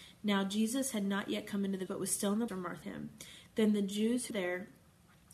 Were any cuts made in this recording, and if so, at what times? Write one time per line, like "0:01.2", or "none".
0:01.9
0:02.5
0:02.8
0:04.3